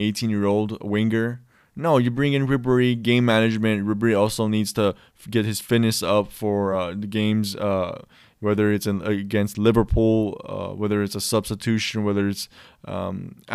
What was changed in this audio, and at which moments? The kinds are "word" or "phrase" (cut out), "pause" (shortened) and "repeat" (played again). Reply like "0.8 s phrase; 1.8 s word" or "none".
none